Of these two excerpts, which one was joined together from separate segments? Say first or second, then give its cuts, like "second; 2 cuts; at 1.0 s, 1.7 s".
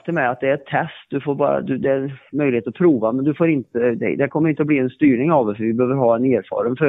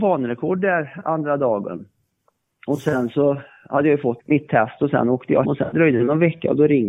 second; 2 cuts; at 4.2 s, 5.4 s